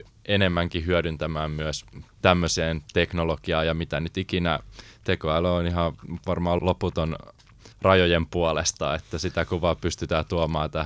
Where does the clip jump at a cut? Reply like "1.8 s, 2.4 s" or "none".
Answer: 6.6 s, 7.7 s

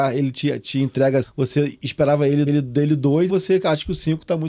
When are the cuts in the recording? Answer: 1.2 s, 2.5 s, 3.3 s

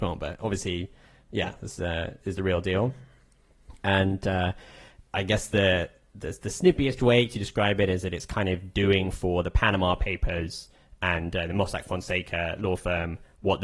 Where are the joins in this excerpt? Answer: none

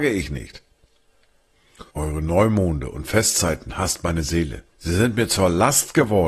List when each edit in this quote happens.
1.9 s, 4.7 s

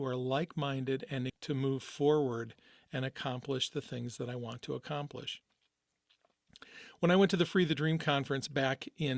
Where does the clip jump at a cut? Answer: 1.3 s

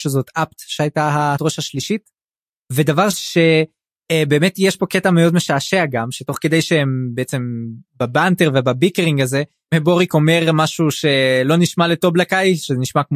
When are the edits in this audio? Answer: 1.4 s, 3.1 s

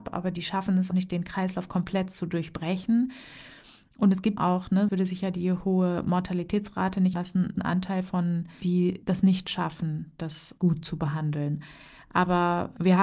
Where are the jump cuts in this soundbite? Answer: 0.9 s, 4.4 s, 4.9 s, 7.1 s, 7.6 s, 8.6 s, 9.0 s, 10.6 s

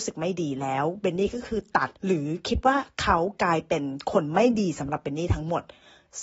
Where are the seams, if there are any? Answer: 2.0 s

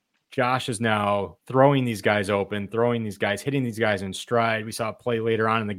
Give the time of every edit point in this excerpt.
1.4 s

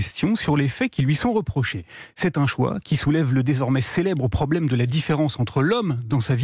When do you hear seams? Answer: none

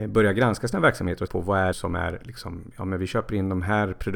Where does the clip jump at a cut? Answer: 1.3 s, 1.7 s

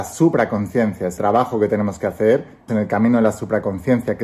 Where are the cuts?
1.2 s, 2.7 s

